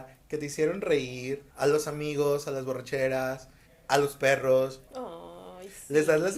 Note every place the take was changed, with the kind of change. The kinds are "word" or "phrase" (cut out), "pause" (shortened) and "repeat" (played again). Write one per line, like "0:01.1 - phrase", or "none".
0:01.5 - pause
0:03.7 - pause
0:04.9 - pause

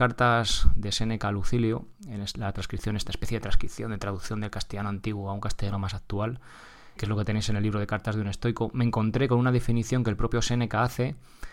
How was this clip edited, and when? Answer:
0:07.0 - word

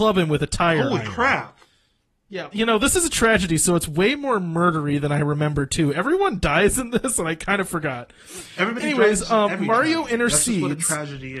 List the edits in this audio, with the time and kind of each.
0:02.5 - word

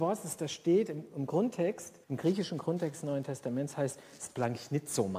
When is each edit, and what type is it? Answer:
0:02.0 - pause

